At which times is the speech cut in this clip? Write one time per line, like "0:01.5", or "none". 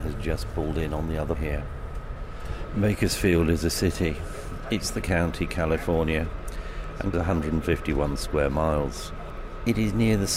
0:01.4
0:05.0
0:07.1